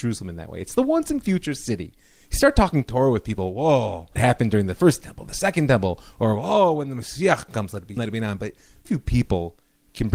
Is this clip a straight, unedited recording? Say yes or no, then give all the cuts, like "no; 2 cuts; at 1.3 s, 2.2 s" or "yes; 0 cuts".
no; 3 cuts; at 4.2 s, 8.0 s, 8.8 s